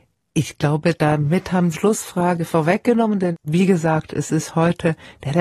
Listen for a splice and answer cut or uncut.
cut